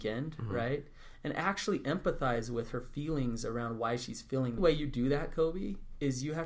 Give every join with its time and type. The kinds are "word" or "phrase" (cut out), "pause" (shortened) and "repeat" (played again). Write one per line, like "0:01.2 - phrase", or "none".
0:04.6 - phrase